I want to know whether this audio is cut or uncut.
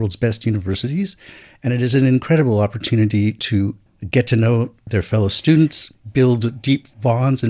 uncut